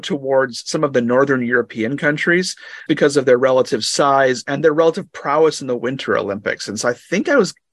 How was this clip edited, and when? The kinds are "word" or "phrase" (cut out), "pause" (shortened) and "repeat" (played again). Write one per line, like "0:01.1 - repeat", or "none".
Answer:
0:02.9 - word